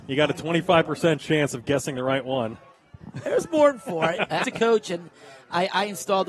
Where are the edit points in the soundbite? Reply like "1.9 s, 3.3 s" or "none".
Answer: 4.4 s